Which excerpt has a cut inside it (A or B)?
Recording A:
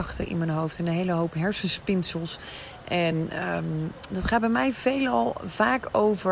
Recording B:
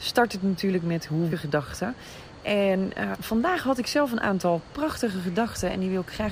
B